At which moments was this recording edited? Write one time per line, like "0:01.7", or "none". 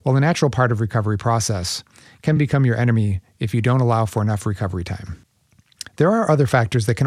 none

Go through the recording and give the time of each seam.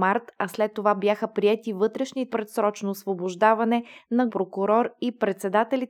0:02.3
0:04.3

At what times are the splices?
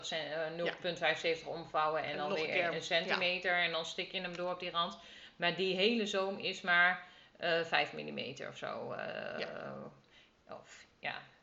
none

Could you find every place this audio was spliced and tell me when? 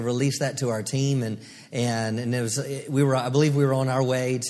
none

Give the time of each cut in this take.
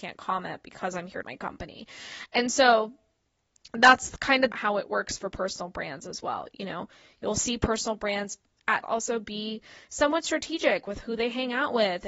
0:01.2
0:04.5
0:08.8

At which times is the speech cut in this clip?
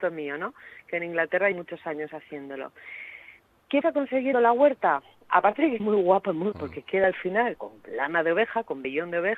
0:01.5
0:03.8
0:04.3
0:05.8
0:06.5
0:07.6

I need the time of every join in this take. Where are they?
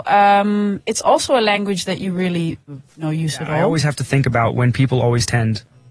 none

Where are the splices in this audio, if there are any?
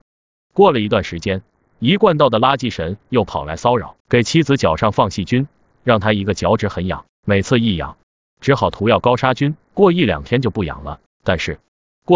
0:04.0
0:09.6

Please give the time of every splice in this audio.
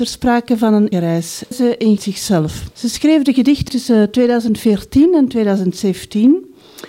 0:00.9
0:01.5
0:02.0
0:02.7
0:03.7

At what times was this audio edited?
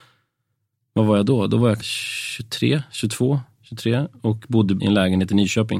0:01.8
0:04.8

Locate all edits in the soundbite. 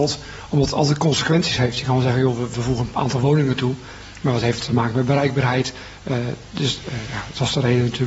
none

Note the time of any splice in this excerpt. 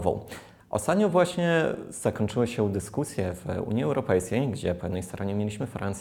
none

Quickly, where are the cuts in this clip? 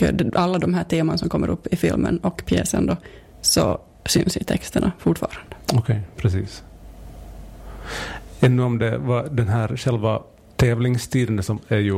none

